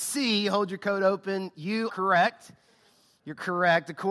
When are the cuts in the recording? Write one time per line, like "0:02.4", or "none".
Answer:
0:01.9